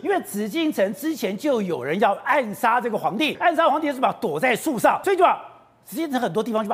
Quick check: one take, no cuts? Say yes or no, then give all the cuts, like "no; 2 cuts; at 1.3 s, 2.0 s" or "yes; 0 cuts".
no; 2 cuts; at 3.3 s, 5.0 s